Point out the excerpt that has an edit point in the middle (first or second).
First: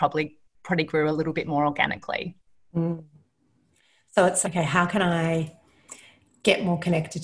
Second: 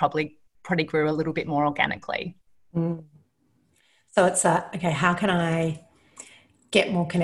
first